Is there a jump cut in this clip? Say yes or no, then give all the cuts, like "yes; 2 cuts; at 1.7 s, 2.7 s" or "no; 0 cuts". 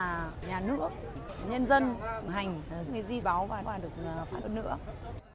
yes; 6 cuts; at 1.4 s, 2.3 s, 2.9 s, 3.2 s, 3.6 s, 4.4 s